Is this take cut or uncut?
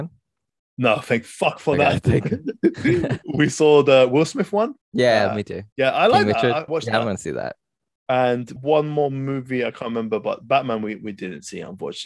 cut